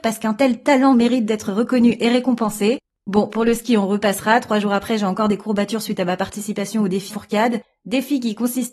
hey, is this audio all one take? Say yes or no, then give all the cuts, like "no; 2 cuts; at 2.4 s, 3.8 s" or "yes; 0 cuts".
no; 1 cut; at 7.1 s